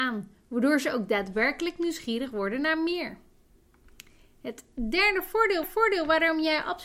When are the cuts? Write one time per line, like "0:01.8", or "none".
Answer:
0:05.6